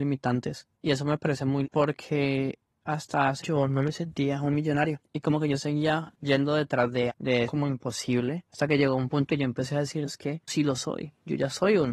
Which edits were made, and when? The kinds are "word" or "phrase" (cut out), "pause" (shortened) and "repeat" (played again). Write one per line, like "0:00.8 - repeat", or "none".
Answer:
0:01.6 - word
0:03.4 - word
0:07.1 - word
0:07.5 - word
0:09.3 - word
0:10.0 - word
0:10.5 - word